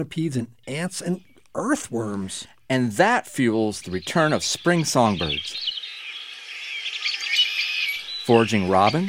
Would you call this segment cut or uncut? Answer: uncut